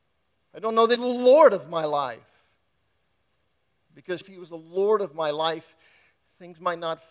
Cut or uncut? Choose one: cut